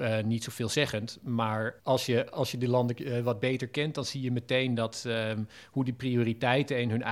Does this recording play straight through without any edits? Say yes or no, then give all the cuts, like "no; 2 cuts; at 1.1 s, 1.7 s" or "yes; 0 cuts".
no; 1 cut; at 1.8 s